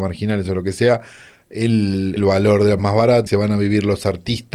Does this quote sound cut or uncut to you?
cut